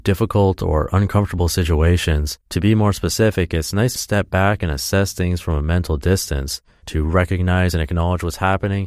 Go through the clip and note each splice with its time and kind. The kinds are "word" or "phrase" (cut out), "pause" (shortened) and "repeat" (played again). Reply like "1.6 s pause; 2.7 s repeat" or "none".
2.4 s pause; 4.0 s phrase